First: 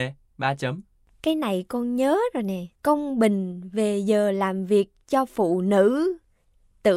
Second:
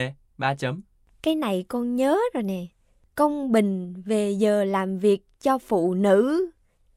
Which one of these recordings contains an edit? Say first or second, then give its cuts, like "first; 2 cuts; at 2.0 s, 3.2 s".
first; 1 cut; at 2.7 s